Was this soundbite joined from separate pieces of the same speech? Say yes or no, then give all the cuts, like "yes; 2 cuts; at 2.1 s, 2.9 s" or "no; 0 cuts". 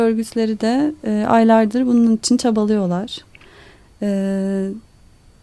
no; 0 cuts